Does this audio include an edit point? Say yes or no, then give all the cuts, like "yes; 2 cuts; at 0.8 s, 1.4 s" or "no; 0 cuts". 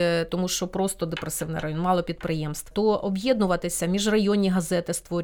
no; 0 cuts